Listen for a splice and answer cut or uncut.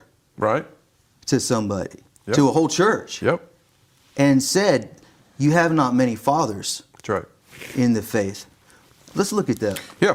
uncut